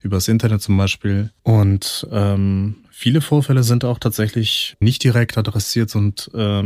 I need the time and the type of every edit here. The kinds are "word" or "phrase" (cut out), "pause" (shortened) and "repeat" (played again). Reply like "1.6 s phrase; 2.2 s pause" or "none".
1.4 s pause; 4.8 s word